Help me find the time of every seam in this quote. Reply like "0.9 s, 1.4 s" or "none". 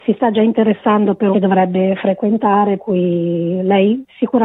1.3 s, 2.8 s